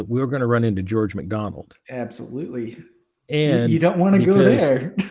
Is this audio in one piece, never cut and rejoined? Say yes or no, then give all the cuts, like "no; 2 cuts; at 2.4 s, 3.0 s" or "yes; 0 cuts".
yes; 0 cuts